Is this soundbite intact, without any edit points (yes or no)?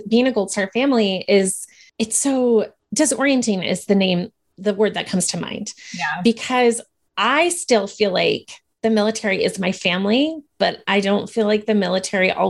yes